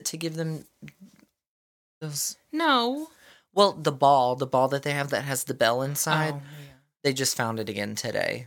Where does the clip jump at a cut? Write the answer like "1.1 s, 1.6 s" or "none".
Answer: none